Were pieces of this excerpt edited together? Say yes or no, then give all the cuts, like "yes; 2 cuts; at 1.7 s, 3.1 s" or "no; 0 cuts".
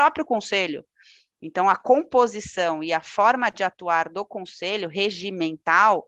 no; 0 cuts